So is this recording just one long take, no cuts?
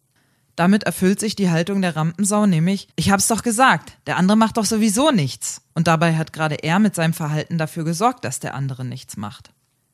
no; 2 cuts; at 2.9 s, 5.7 s

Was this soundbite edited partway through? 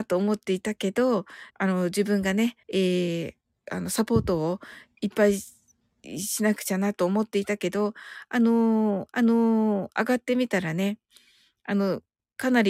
yes; 3 cuts; at 1.5 s, 2.6 s, 9.1 s

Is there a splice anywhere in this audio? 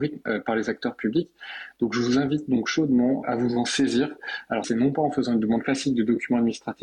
yes; 2 cuts; at 3.2 s, 4.6 s

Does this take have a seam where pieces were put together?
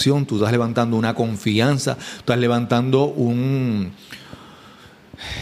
no; 0 cuts

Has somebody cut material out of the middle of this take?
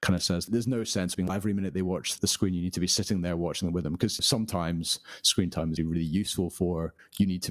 yes; 3 cuts; at 1.3 s, 2.2 s, 5.8 s

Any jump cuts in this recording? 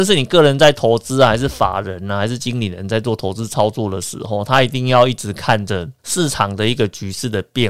yes; 1 cut; at 6.0 s

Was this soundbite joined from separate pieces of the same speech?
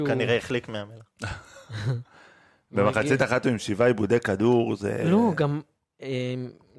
no; 0 cuts

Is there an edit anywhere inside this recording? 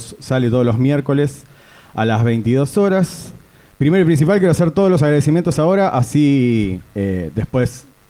no; 0 cuts

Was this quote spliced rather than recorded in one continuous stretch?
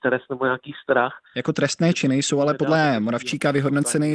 yes; 1 cut; at 1.3 s

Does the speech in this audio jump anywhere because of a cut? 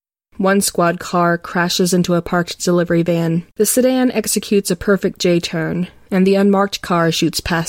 yes; 1 cut; at 3.5 s

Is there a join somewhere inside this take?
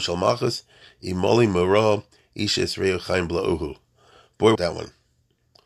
yes; 1 cut; at 4.6 s

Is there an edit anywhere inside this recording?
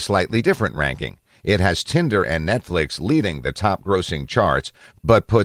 no; 0 cuts

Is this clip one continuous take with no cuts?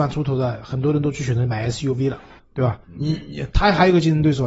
no; 2 cuts; at 2.4 s, 2.8 s

